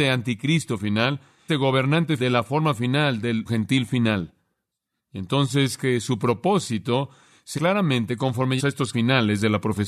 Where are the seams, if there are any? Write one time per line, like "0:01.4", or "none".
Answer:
0:01.5
0:02.2
0:03.5
0:05.8
0:07.6
0:08.6
0:08.9